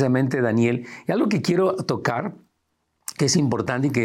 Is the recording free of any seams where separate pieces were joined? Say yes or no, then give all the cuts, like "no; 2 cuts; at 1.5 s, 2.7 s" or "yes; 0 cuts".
yes; 0 cuts